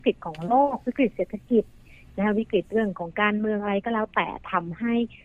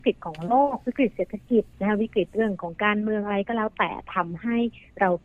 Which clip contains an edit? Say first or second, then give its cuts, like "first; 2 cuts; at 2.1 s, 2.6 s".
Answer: second; 1 cut; at 1.7 s